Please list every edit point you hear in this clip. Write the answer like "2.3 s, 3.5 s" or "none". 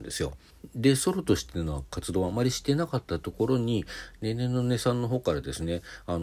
none